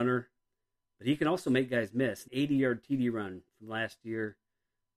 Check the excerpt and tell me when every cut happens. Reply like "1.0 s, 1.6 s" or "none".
2.3 s